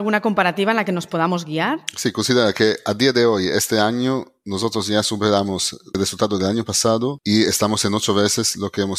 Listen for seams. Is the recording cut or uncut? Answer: uncut